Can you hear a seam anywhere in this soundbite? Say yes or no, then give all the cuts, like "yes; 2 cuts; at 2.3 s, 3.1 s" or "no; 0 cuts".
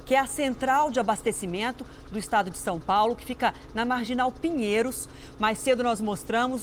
no; 0 cuts